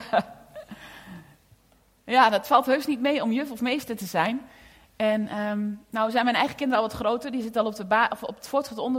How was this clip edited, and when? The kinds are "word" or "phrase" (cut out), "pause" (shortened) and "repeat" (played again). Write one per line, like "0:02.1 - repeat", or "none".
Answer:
none